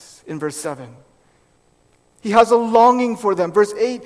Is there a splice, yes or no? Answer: no